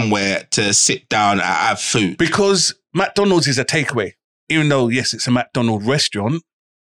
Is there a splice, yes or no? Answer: no